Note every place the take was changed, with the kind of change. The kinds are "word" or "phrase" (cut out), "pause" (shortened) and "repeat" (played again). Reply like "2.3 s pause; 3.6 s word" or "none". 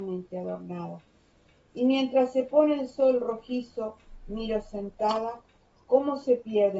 none

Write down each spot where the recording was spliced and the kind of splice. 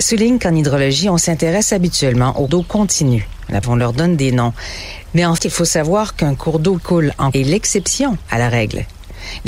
2.5 s word; 3.6 s word; 5.4 s word; 6.8 s word; 7.3 s word

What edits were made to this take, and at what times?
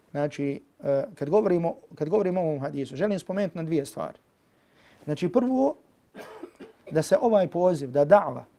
none

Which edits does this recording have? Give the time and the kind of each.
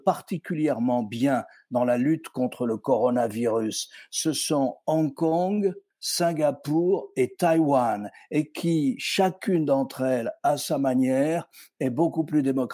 none

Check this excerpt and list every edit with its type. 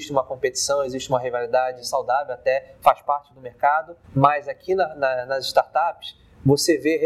4.0 s pause

